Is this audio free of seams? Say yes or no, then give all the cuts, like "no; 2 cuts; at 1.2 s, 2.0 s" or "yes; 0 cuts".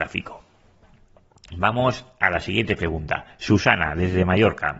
yes; 0 cuts